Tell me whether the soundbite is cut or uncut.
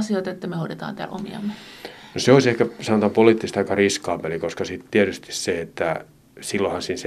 uncut